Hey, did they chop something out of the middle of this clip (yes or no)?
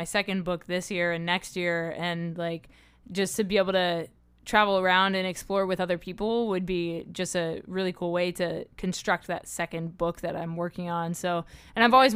no